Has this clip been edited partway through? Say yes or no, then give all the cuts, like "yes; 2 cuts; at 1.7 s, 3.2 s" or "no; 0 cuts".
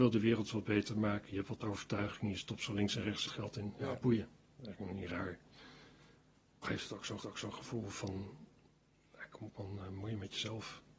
yes; 3 cuts; at 3.2 s, 6.6 s, 7.2 s